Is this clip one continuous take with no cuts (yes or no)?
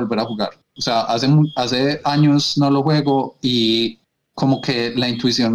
yes